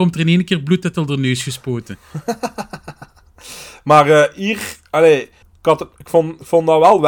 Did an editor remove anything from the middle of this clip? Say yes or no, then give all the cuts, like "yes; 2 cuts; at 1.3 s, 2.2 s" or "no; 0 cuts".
yes; 1 cut; at 5.4 s